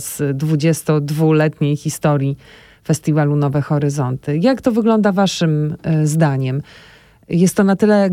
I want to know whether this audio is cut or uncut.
uncut